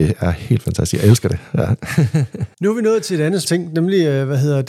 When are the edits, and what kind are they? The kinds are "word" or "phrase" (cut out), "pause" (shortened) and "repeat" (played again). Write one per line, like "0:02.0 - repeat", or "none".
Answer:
0:02.5 - pause
0:03.4 - word